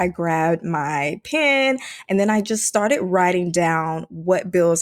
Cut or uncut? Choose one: uncut